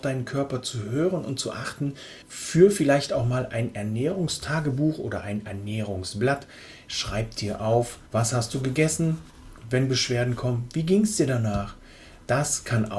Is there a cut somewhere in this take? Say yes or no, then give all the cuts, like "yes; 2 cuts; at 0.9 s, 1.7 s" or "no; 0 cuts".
yes; 2 cuts; at 2.2 s, 8.1 s